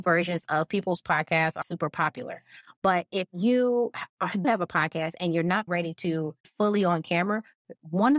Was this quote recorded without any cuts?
no; 4 cuts; at 1.6 s, 4.4 s, 5.7 s, 6.4 s

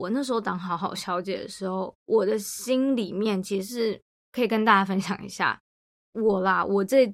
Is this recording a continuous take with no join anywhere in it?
yes; 0 cuts

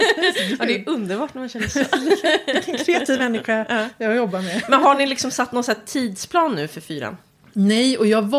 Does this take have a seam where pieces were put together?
no; 0 cuts

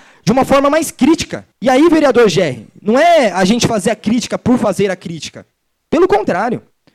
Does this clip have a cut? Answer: yes; 1 cut; at 1.5 s

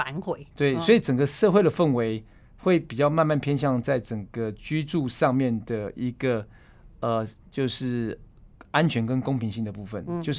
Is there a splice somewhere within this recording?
no; 0 cuts

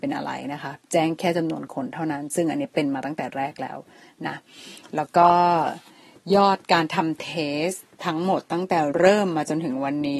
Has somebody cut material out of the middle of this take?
yes; 1 cut; at 7.9 s

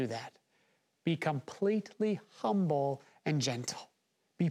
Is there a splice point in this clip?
no; 0 cuts

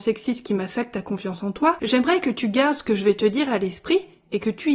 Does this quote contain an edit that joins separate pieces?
no; 0 cuts

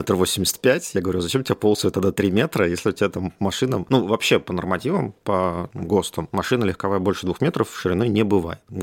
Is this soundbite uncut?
yes; 0 cuts

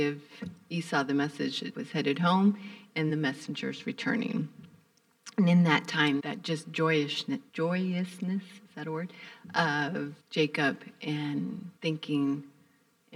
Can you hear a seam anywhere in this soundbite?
yes; 6 cuts; at 1.7 s, 3.1 s, 6.2 s, 7.5 s, 10.2 s, 11.8 s

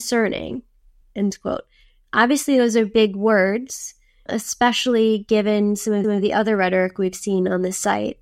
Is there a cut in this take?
yes; 2 cuts; at 1.0 s, 6.0 s

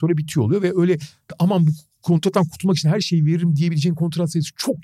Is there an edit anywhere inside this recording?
no; 0 cuts

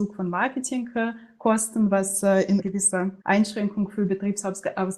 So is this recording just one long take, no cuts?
no; 2 cuts; at 2.6 s, 3.2 s

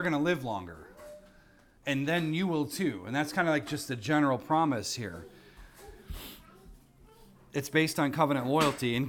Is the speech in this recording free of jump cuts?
yes; 0 cuts

